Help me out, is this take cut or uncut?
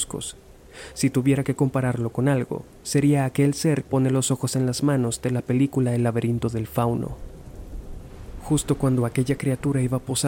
cut